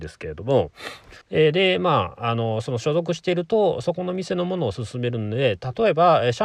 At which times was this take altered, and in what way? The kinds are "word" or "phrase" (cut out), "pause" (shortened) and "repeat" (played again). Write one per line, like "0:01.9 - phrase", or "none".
0:01.2 - pause